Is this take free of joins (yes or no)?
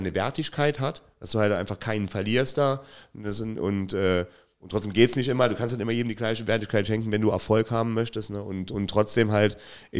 yes